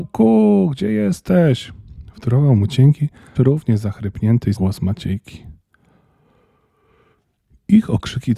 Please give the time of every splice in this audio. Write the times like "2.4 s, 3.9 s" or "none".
3.4 s, 4.6 s